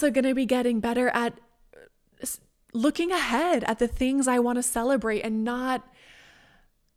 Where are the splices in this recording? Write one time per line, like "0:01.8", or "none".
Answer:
none